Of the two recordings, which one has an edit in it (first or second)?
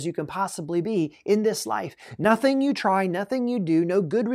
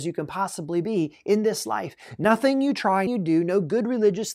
second